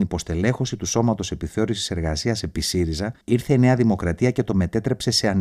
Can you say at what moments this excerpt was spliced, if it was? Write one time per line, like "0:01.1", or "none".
0:03.2